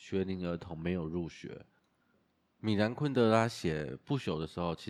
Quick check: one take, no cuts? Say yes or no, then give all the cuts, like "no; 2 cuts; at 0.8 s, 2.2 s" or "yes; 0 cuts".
yes; 0 cuts